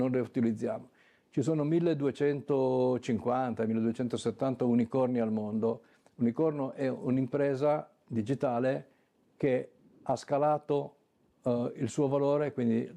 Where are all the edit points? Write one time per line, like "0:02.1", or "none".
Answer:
none